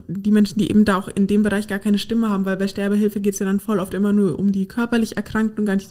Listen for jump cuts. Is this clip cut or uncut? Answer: uncut